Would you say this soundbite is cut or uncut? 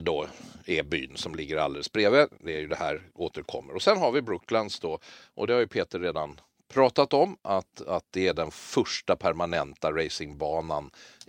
uncut